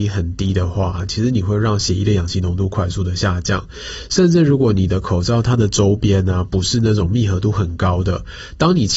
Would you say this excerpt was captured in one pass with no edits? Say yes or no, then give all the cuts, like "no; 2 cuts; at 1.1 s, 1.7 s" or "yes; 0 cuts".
yes; 0 cuts